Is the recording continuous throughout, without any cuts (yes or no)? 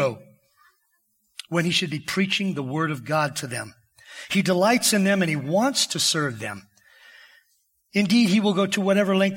yes